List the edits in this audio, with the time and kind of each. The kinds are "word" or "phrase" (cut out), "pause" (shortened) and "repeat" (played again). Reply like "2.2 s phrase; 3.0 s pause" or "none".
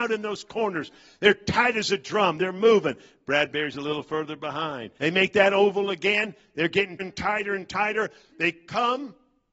5.0 s pause; 7.0 s word